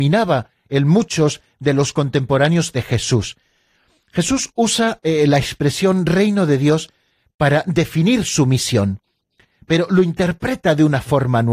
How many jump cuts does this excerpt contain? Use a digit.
0